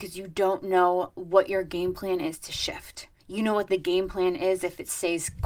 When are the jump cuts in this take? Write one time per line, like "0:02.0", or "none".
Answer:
0:03.2